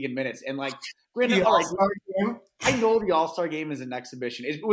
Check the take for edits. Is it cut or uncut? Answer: uncut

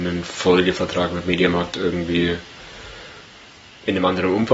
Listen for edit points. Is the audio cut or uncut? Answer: uncut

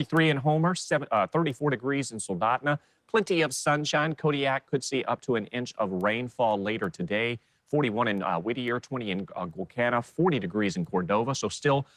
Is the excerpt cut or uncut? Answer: uncut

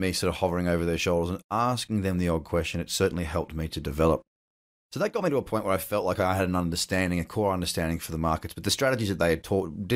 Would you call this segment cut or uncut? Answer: uncut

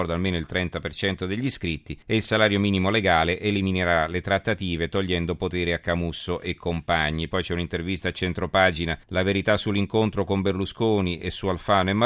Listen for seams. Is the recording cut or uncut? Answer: cut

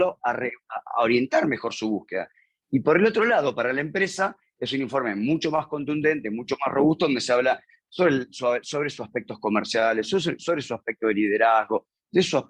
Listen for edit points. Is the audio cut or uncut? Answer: uncut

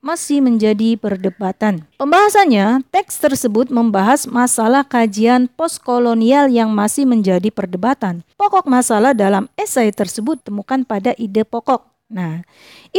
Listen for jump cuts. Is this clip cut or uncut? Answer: cut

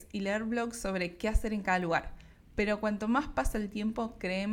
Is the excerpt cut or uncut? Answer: uncut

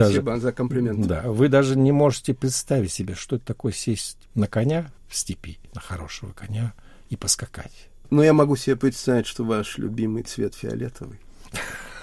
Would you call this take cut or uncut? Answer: uncut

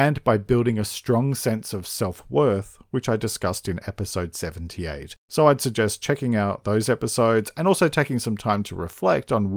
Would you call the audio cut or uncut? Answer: uncut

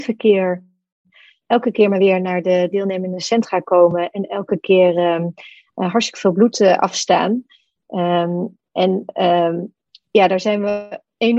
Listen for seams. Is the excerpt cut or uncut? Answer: uncut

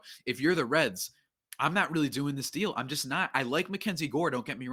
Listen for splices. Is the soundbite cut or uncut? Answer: uncut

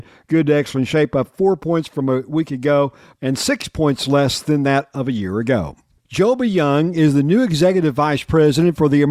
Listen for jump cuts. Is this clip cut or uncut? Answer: uncut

